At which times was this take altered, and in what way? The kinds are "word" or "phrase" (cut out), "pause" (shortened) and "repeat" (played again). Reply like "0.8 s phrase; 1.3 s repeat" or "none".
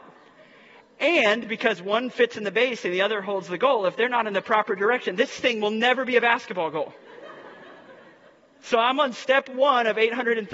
none